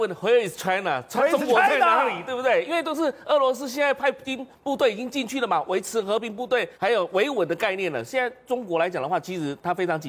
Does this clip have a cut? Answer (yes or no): yes